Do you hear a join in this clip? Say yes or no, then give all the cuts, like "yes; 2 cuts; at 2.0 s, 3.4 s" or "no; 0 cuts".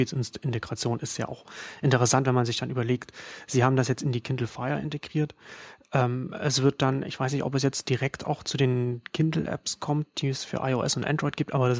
no; 0 cuts